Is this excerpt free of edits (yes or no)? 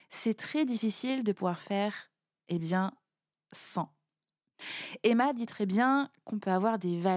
yes